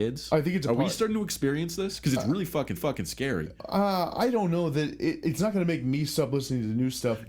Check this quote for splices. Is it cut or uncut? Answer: cut